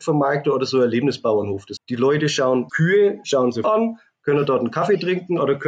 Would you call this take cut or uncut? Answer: cut